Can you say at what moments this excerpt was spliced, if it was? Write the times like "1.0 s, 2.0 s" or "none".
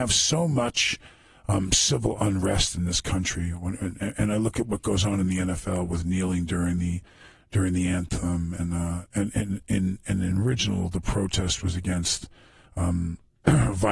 none